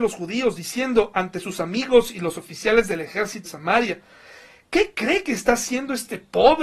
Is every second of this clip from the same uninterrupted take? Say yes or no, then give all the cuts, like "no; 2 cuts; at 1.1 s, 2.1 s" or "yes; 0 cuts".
no; 1 cut; at 3.4 s